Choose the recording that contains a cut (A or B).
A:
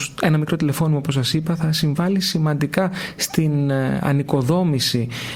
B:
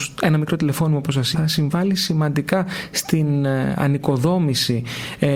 B